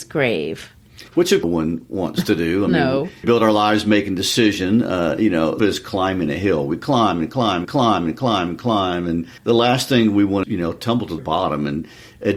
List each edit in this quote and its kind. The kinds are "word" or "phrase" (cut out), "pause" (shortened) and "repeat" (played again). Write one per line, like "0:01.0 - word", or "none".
0:01.1 - pause
0:01.4 - phrase
0:03.2 - word
0:05.6 - phrase
0:07.6 - repeat
0:09.4 - pause
0:10.4 - phrase
0:11.2 - word